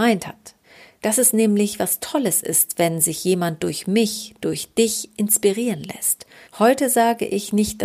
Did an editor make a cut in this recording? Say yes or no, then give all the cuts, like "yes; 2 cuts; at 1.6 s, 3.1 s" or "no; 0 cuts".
yes; 1 cut; at 6.4 s